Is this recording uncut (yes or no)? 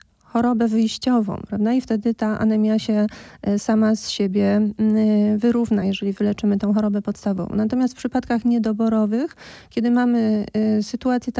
yes